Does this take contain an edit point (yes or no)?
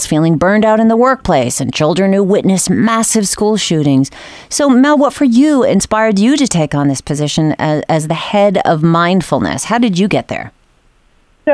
no